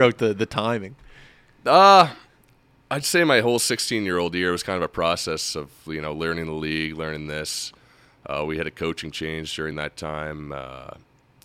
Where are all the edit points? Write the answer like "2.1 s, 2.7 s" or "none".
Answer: none